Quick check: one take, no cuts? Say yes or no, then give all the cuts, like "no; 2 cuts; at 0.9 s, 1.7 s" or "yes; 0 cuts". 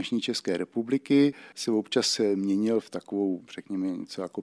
yes; 0 cuts